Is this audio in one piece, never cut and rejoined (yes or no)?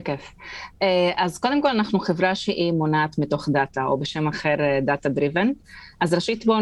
yes